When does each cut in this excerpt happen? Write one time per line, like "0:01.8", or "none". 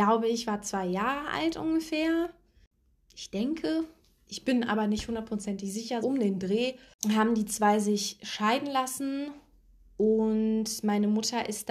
0:06.0

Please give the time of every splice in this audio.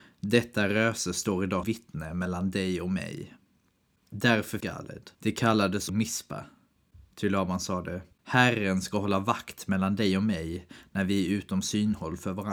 0:01.6
0:04.6
0:05.1
0:05.9
0:08.1

